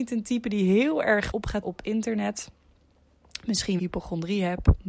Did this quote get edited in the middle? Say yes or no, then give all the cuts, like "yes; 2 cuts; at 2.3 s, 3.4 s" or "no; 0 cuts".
yes; 3 cuts; at 1.3 s, 1.6 s, 3.8 s